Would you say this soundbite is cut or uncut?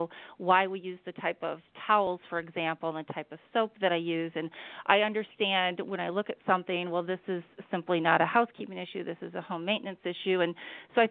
uncut